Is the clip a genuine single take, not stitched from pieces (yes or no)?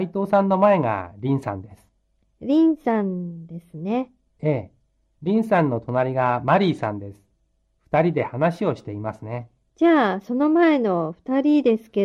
yes